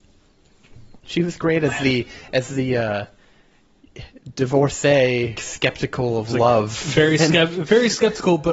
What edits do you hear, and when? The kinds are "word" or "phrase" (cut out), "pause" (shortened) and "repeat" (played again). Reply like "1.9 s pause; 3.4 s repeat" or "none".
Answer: 1.0 s pause; 5.3 s phrase